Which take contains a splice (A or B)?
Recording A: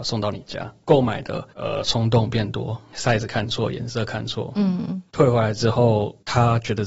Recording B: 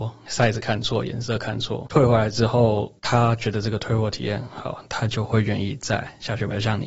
B